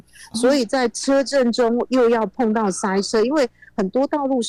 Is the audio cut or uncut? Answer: uncut